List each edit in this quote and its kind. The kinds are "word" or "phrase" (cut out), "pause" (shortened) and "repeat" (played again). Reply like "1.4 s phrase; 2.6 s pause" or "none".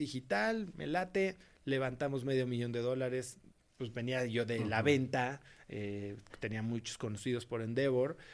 none